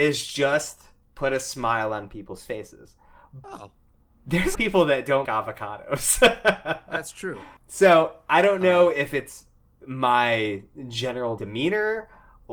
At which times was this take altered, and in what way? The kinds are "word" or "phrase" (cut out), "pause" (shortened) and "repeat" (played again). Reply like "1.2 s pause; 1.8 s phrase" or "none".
3.4 s word; 4.5 s phrase; 5.2 s word; 7.6 s pause; 9.7 s pause; 11.4 s word